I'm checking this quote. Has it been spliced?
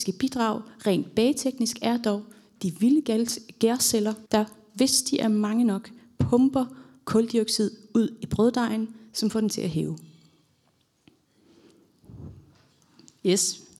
yes; 1 cut; at 4.3 s

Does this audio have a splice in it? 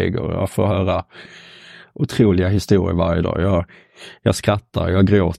no; 0 cuts

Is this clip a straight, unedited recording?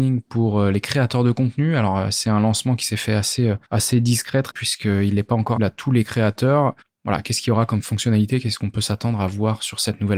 no; 4 cuts; at 3.6 s, 4.5 s, 5.6 s, 6.8 s

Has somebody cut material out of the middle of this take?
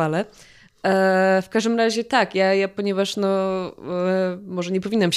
no; 0 cuts

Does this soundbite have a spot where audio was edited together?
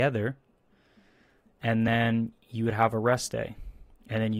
no; 0 cuts

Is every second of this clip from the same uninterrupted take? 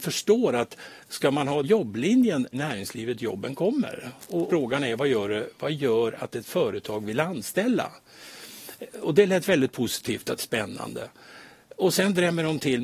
no; 4 cuts; at 1.6 s, 2.5 s, 4.5 s, 10.4 s

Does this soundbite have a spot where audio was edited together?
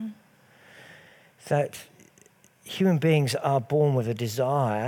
no; 0 cuts

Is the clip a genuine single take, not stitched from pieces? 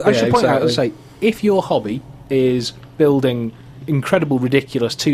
yes; 0 cuts

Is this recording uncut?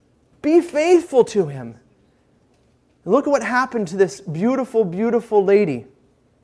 yes; 0 cuts

